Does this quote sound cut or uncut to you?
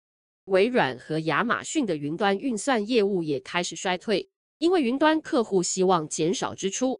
uncut